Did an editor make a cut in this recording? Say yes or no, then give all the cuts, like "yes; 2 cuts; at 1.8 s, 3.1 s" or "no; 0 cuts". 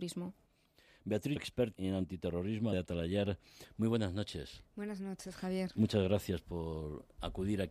yes; 3 cuts; at 1.4 s, 1.7 s, 2.7 s